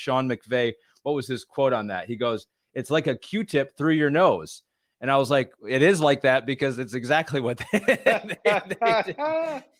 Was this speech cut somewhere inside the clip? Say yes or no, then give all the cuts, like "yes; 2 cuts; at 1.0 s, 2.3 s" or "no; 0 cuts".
no; 0 cuts